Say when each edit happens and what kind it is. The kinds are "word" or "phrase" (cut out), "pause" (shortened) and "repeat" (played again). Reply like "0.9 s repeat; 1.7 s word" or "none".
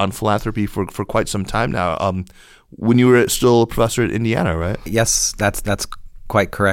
none